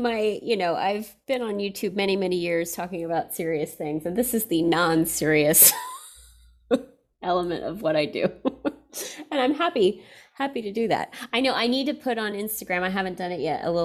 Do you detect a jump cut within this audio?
no; 0 cuts

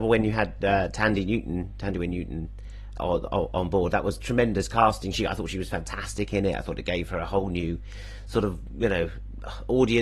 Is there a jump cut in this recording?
yes; 1 cut; at 2.9 s

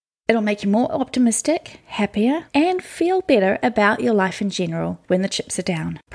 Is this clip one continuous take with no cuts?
no; 1 cut; at 5.1 s

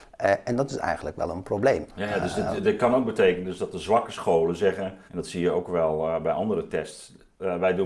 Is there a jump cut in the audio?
yes; 1 cut; at 5.1 s

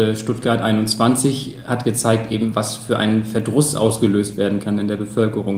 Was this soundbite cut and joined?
no; 0 cuts

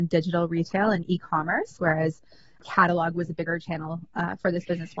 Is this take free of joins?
yes; 0 cuts

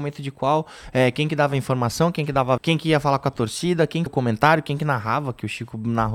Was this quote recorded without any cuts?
no; 2 cuts; at 2.6 s, 4.1 s

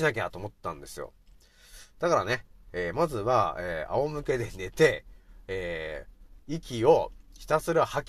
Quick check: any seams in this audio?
no; 0 cuts

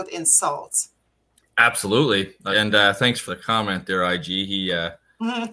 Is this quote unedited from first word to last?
no; 3 cuts; at 1.3 s, 2.5 s, 3.3 s

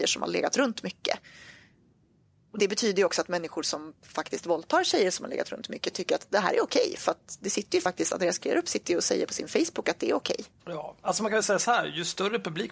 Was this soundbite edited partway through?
no; 0 cuts

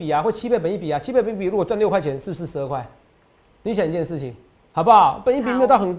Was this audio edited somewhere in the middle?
no; 0 cuts

